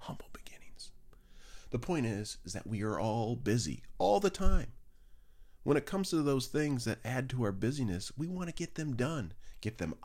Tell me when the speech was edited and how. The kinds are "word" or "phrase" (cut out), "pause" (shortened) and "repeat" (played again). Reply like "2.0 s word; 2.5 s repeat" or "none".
none